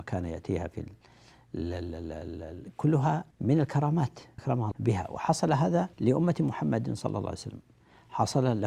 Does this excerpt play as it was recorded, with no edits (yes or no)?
no